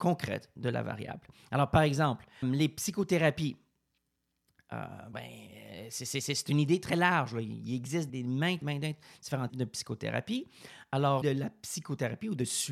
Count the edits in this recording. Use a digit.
6